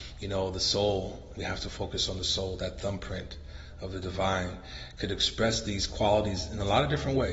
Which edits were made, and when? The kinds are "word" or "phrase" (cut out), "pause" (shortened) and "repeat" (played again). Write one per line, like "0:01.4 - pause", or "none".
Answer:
0:01.3 - word